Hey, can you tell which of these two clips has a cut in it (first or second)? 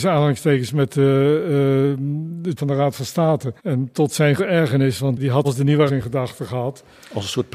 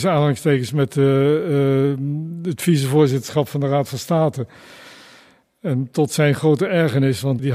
first